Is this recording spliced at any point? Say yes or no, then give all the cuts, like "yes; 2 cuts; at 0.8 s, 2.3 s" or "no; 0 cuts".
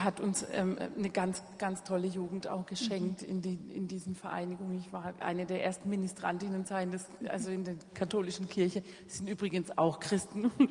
yes; 2 cuts; at 5.2 s, 7.2 s